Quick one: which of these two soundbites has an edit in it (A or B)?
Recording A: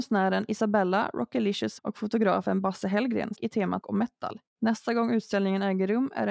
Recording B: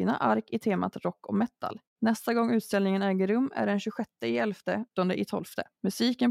A